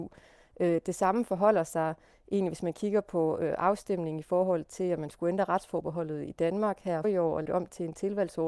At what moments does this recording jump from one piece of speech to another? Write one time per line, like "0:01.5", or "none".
0:07.0
0:07.5